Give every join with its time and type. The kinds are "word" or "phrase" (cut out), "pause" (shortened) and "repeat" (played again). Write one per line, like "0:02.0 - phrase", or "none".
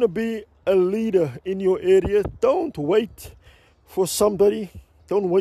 none